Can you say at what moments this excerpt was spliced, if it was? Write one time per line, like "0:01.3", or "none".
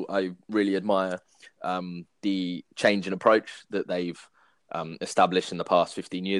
none